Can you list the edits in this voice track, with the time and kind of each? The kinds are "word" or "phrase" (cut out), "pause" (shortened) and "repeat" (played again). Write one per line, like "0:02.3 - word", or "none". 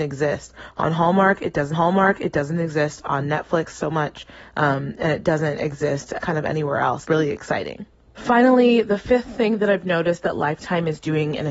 0:01.7 - repeat
0:06.2 - word
0:07.0 - word
0:08.1 - pause